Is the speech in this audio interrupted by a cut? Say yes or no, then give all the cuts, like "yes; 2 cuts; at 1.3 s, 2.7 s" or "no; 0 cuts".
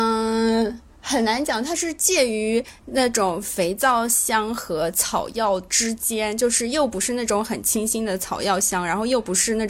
no; 0 cuts